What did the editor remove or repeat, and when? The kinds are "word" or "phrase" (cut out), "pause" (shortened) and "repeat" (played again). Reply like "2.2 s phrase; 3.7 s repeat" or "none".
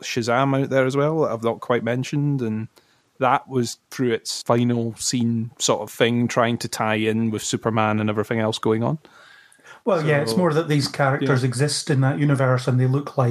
none